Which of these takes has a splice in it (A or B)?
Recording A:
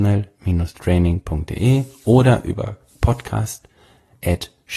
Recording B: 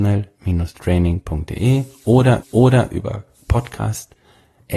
B